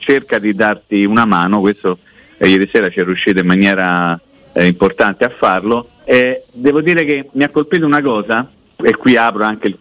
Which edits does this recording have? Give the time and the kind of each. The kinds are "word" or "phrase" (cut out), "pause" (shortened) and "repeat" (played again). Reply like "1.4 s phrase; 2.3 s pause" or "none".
6.0 s pause; 8.7 s word